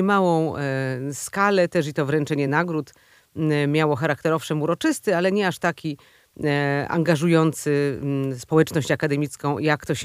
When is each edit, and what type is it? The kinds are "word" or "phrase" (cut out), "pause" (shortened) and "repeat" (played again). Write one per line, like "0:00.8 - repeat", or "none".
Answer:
none